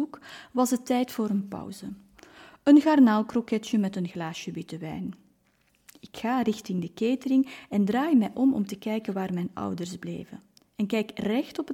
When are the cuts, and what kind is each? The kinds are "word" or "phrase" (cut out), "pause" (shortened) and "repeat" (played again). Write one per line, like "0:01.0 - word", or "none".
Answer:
none

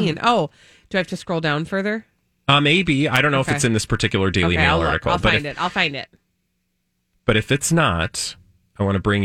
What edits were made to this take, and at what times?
none

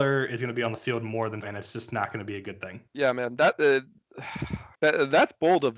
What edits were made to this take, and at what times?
0:01.4 - word
0:02.9 - pause
0:04.7 - pause

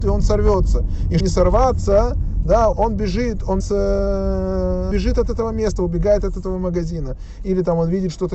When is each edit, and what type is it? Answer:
0:01.2 - word
0:02.7 - word
0:03.6 - word
0:04.9 - word

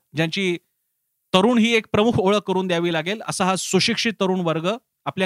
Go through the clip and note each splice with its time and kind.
none

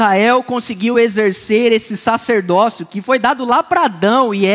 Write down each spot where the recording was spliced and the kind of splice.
none

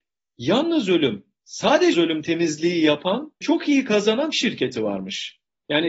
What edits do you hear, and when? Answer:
0:01.9 - word
0:03.4 - word
0:04.3 - word

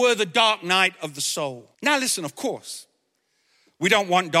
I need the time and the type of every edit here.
0:01.7 - pause

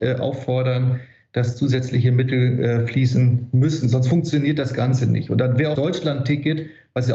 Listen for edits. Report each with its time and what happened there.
0:05.7 - phrase

